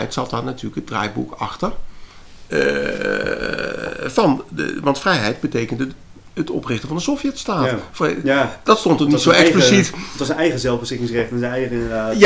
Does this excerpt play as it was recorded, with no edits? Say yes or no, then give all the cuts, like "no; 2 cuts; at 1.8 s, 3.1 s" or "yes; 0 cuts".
yes; 0 cuts